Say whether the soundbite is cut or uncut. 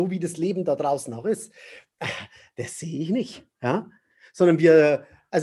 uncut